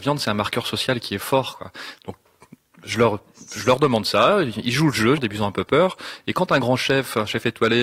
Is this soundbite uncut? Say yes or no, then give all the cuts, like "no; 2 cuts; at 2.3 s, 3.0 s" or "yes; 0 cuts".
no; 1 cut; at 5.2 s